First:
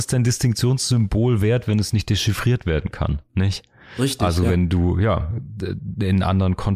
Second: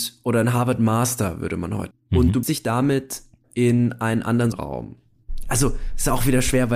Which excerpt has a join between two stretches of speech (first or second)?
second